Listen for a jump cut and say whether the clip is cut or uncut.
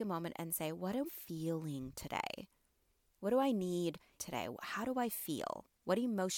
cut